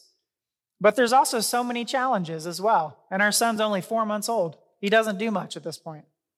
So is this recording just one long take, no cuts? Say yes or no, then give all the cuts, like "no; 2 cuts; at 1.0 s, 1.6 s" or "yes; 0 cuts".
yes; 0 cuts